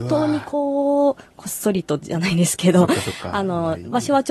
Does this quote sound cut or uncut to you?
uncut